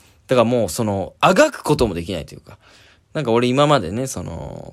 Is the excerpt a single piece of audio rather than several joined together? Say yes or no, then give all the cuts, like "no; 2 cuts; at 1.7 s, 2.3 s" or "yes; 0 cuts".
no; 1 cut; at 1.2 s